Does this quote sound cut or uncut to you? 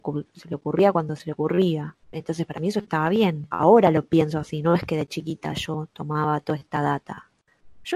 cut